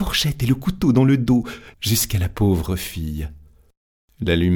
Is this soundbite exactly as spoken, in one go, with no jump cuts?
yes; 0 cuts

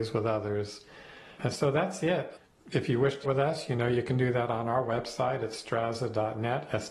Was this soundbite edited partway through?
yes; 1 cut; at 3.2 s

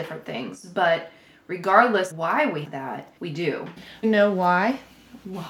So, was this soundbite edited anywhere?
yes; 4 cuts; at 2.1 s, 2.6 s, 3.2 s, 4.0 s

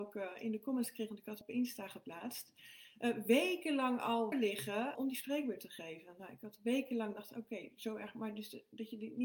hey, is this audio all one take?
no; 3 cuts; at 1.4 s, 4.3 s, 4.9 s

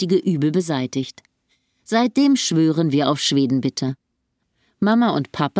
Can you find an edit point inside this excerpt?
no; 0 cuts

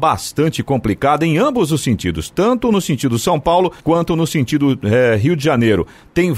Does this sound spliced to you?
yes; 1 cut; at 3.8 s

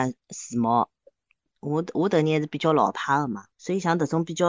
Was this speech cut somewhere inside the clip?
yes; 1 cut; at 3.5 s

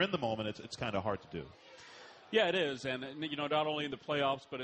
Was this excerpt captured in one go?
yes; 0 cuts

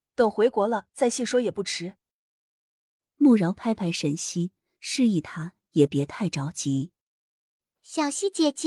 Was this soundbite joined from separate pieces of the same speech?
no; 0 cuts

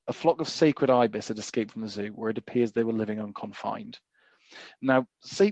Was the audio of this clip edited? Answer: no; 0 cuts

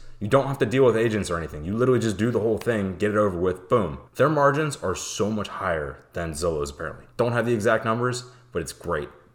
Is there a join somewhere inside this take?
yes; 2 cuts; at 4.1 s, 7.1 s

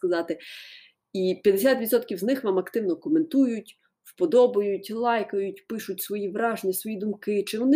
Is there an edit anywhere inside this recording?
no; 0 cuts

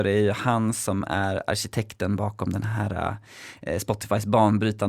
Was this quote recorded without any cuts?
yes; 0 cuts

